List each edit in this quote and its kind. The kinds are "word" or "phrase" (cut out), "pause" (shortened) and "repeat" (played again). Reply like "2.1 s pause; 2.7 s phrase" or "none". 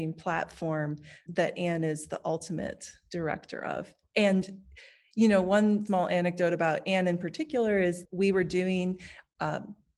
1.3 s word; 5.9 s word; 8.0 s word